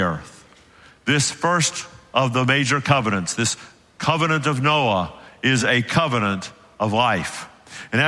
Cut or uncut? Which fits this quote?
uncut